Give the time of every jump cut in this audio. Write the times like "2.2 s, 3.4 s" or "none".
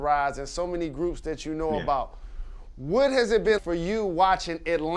3.6 s

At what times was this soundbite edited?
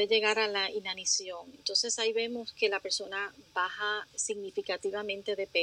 none

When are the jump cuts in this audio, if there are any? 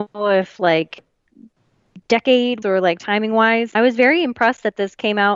2.6 s, 3.7 s

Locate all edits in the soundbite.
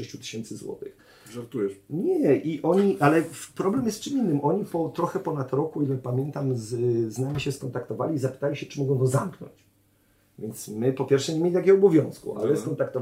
none

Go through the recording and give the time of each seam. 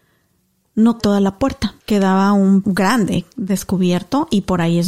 1.0 s, 1.8 s, 2.6 s

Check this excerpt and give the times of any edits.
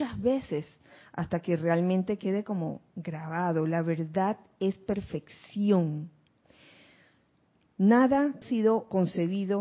8.4 s

